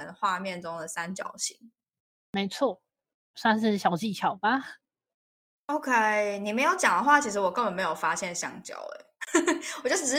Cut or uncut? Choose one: uncut